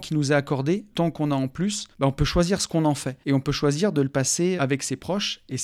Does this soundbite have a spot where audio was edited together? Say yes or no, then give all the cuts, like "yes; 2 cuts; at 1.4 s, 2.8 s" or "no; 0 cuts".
yes; 4 cuts; at 0.9 s, 1.9 s, 3.2 s, 4.6 s